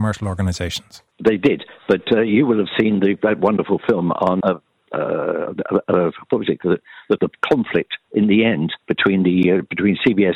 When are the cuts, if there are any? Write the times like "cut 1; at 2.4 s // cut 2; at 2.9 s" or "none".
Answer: cut 1; at 1.1 s // cut 2; at 4.4 s // cut 3; at 7.2 s // cut 4; at 8.8 s